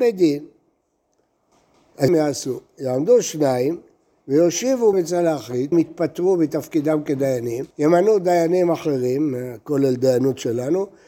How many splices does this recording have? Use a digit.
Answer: 4